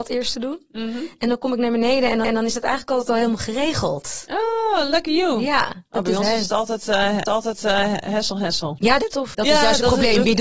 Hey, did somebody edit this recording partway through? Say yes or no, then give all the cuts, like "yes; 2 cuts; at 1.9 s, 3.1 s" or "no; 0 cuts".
yes; 4 cuts; at 2.2 s, 7.3 s, 9.0 s, 9.3 s